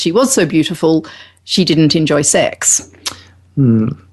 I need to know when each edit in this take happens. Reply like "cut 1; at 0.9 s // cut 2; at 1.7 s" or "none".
none